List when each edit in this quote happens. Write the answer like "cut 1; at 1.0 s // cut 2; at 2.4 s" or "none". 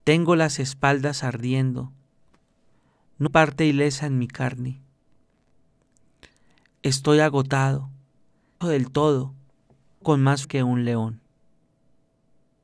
cut 1; at 3.3 s // cut 2; at 8.6 s // cut 3; at 10.0 s // cut 4; at 10.4 s